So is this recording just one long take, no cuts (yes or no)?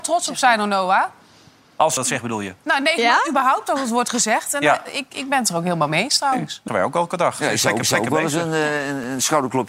no